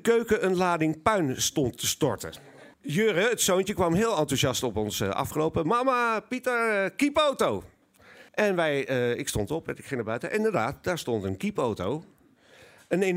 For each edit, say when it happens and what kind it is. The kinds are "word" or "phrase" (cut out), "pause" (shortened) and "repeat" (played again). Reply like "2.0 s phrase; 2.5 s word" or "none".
2.7 s pause; 8.3 s pause